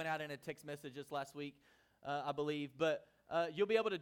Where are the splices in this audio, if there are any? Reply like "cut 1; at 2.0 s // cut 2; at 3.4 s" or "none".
none